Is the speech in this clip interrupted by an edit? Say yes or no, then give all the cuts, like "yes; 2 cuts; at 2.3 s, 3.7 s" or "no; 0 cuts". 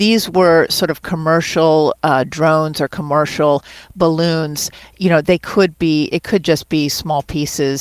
no; 0 cuts